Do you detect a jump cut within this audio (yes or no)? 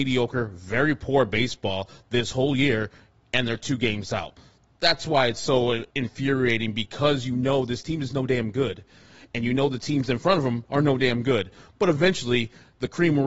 yes